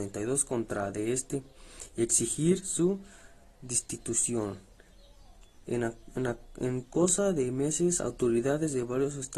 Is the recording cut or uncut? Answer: uncut